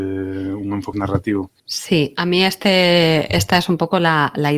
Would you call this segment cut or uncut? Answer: cut